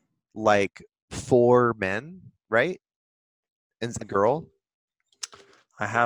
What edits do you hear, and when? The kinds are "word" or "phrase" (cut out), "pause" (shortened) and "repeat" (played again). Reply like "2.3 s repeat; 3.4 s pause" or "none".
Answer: 4.0 s phrase